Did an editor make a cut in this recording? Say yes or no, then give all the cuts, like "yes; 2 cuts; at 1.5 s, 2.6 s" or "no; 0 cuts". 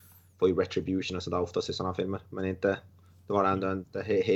no; 0 cuts